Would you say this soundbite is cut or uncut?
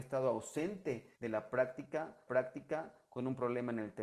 cut